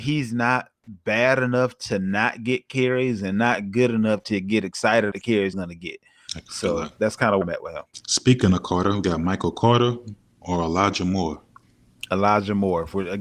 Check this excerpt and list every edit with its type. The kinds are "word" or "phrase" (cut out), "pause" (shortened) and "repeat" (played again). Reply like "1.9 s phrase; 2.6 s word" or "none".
5.1 s word; 5.5 s word; 7.4 s word